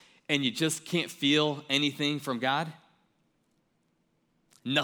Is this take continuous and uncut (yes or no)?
yes